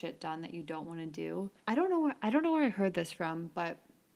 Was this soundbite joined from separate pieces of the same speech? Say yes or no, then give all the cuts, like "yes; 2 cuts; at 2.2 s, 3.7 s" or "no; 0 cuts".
yes; 1 cut; at 1.6 s